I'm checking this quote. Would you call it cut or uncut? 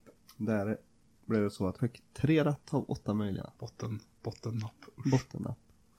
cut